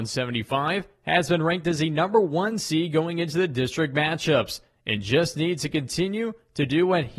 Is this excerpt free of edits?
yes; 0 cuts

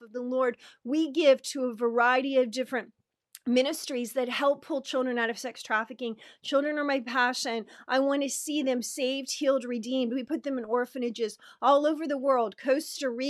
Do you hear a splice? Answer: no; 0 cuts

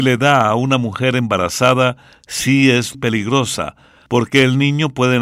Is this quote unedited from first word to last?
no; 1 cut; at 2.9 s

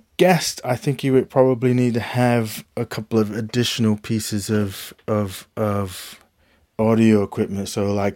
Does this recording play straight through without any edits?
yes; 0 cuts

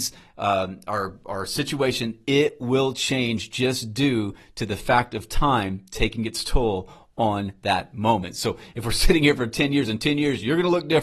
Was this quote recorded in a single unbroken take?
yes; 0 cuts

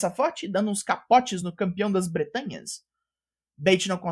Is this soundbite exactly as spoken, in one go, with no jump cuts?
yes; 0 cuts

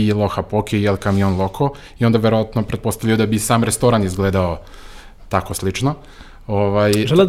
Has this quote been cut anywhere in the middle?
no; 0 cuts

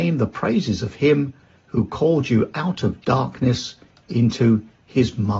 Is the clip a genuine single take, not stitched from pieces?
yes; 0 cuts

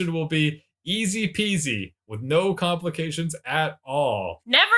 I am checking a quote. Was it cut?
no; 0 cuts

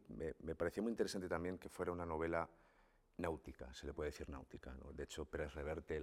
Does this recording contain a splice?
no; 0 cuts

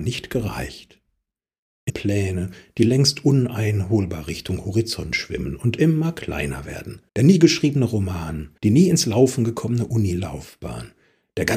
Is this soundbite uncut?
no; 3 cuts; at 1.9 s, 7.1 s, 8.6 s

